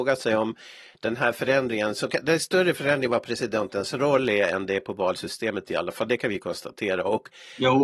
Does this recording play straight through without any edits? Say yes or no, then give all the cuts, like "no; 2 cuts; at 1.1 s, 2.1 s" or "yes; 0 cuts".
yes; 0 cuts